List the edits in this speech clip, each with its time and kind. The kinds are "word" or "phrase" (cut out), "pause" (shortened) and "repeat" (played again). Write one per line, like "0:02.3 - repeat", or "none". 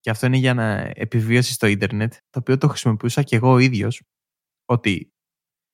0:02.2 - pause